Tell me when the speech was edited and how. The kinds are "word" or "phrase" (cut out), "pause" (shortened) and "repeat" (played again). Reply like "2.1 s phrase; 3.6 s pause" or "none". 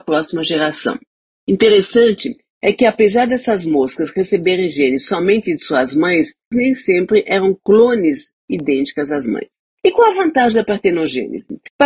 6.5 s word